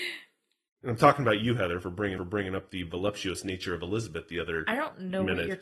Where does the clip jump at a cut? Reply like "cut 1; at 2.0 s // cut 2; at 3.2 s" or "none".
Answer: cut 1; at 2.2 s